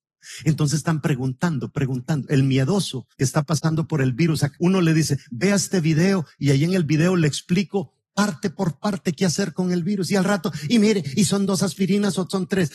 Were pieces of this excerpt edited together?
yes; 2 cuts; at 3.1 s, 4.6 s

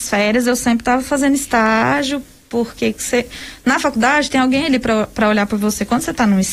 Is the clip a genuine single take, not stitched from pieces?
yes; 0 cuts

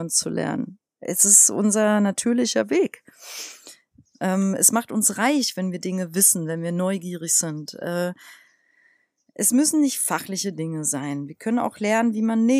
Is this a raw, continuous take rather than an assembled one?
yes; 0 cuts

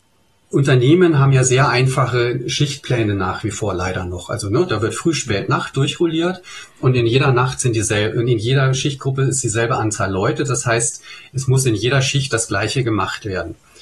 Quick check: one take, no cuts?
yes; 0 cuts

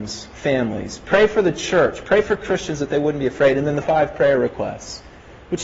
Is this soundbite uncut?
no; 1 cut; at 3.8 s

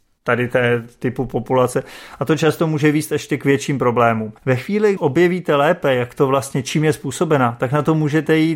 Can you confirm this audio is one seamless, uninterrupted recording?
no; 2 cuts; at 4.4 s, 5.0 s

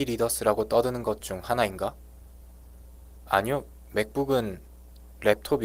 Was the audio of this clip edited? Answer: no; 0 cuts

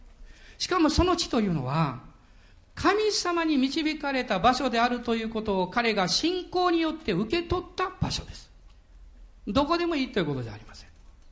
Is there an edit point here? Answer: no; 0 cuts

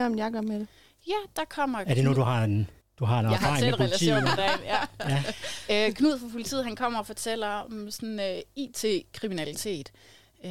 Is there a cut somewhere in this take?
yes; 1 cut; at 2.8 s

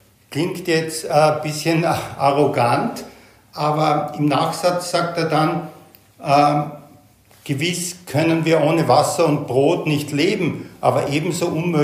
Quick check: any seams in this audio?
no; 0 cuts

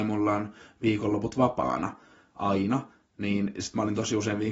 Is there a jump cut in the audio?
no; 0 cuts

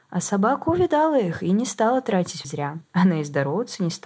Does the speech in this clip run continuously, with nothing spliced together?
no; 2 cuts; at 2.4 s, 2.8 s

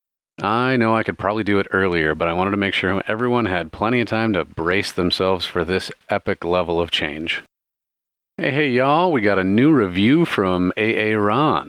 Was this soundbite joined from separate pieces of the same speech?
no; 0 cuts

